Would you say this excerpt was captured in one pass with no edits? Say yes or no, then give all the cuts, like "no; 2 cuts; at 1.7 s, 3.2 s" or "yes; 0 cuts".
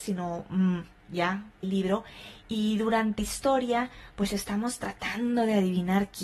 no; 2 cuts; at 1.6 s, 3.2 s